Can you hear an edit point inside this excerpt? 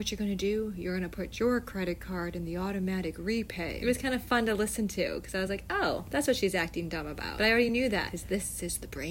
no; 0 cuts

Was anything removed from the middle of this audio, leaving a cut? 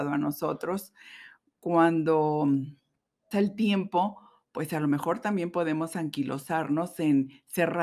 yes; 1 cut; at 3.3 s

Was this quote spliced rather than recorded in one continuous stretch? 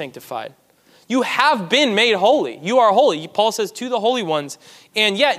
no; 0 cuts

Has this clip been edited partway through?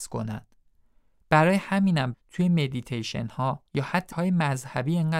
yes; 3 cuts; at 2.1 s, 3.7 s, 4.1 s

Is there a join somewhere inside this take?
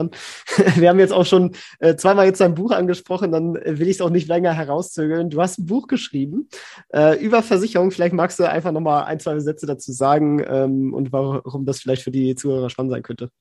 no; 0 cuts

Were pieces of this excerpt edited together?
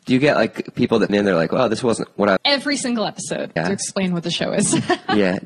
yes; 3 cuts; at 1.1 s, 2.4 s, 3.6 s

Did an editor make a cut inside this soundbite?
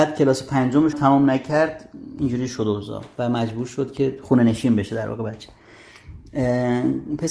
yes; 1 cut; at 0.9 s

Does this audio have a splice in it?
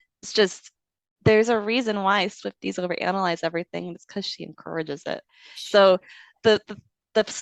no; 0 cuts

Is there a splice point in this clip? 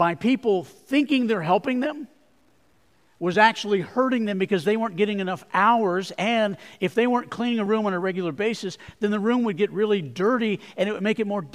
no; 0 cuts

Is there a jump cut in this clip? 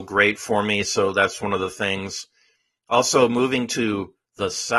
no; 0 cuts

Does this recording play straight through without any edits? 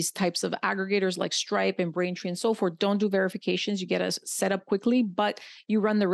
yes; 0 cuts

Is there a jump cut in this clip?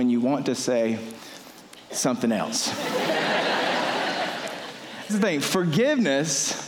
yes; 1 cut; at 5.1 s

